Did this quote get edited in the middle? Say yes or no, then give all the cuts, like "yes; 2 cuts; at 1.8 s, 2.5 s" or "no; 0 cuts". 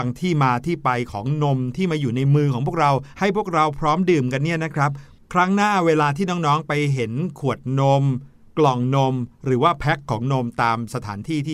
no; 0 cuts